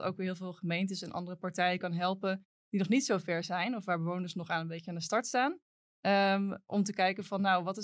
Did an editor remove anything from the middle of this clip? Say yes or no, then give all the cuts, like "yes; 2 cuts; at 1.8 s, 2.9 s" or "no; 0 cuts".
no; 0 cuts